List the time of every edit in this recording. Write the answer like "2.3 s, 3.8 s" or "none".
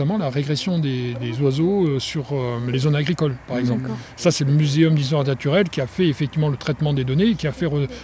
none

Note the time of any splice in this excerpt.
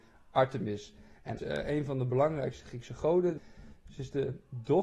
1.4 s

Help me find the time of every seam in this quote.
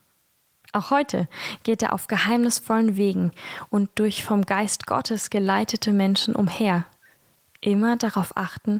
none

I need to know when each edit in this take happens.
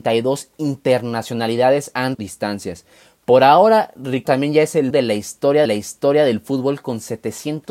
2.1 s, 4.2 s, 4.9 s, 5.6 s

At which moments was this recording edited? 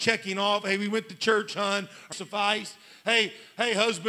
2.1 s

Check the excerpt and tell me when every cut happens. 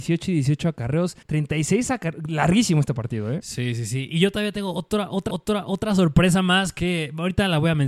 1.2 s, 5.3 s

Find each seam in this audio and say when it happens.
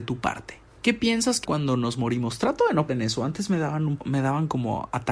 1.4 s, 2.9 s, 4.0 s

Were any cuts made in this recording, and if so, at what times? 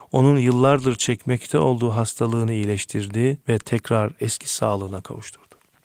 3.4 s

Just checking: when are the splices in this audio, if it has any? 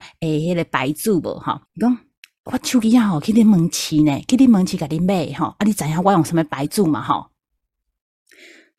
1.7 s

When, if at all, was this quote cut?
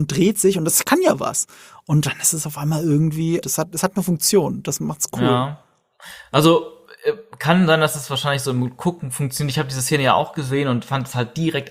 3.4 s

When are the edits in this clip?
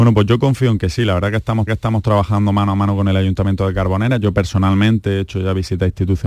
1.7 s

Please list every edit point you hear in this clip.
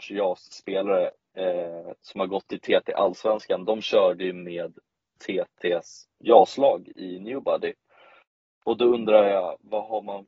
6.1 s

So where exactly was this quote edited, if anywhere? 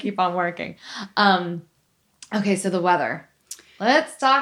none

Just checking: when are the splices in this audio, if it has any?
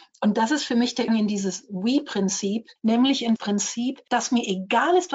1.1 s, 2.8 s, 3.4 s

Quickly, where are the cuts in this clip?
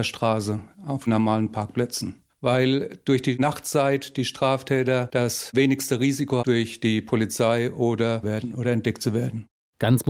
6.4 s, 8.2 s

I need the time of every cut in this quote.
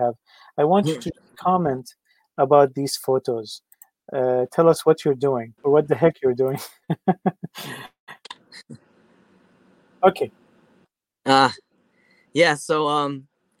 5.6 s

